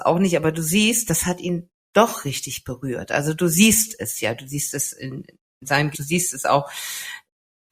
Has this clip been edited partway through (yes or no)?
yes